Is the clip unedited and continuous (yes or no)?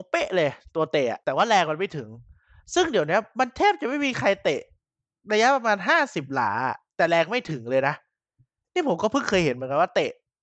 no